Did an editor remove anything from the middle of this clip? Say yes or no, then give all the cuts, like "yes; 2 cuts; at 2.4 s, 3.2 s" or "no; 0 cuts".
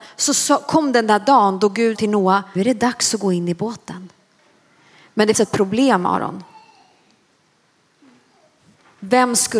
yes; 3 cuts; at 1.9 s, 2.6 s, 5.3 s